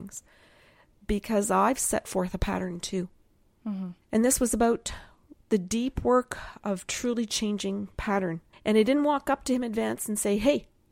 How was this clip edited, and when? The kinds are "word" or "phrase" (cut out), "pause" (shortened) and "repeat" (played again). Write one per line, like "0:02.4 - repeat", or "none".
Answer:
0:04.0 - pause
0:08.5 - pause